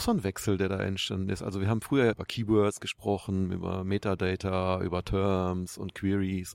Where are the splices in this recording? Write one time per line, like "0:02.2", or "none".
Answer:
0:02.1